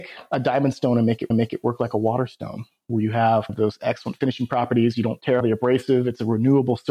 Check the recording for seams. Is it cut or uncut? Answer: cut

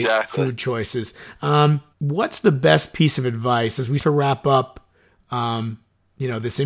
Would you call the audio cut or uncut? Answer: cut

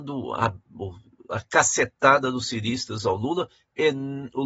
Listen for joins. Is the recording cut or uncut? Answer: uncut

